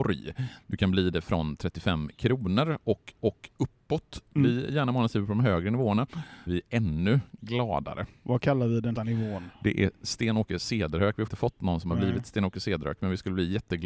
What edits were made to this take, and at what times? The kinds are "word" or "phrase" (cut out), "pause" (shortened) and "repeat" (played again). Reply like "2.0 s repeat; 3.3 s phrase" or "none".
3.2 s repeat; 6.5 s phrase; 9.0 s word; 11.3 s word